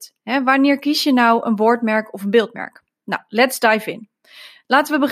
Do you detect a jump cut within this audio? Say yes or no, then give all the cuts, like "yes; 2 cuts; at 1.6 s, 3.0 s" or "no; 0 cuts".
no; 0 cuts